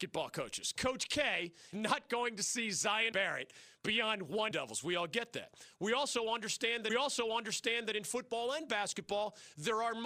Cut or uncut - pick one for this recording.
cut